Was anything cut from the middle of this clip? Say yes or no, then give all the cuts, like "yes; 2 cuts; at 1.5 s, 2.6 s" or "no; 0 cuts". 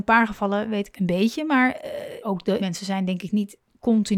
yes; 3 cuts; at 0.9 s, 2.2 s, 2.6 s